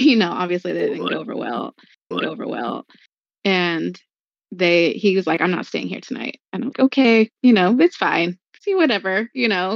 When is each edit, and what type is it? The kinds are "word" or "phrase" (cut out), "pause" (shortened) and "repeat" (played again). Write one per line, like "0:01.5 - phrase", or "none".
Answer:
0:02.1 - repeat
0:06.7 - word